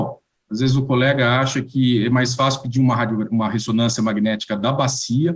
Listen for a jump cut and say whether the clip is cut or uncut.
uncut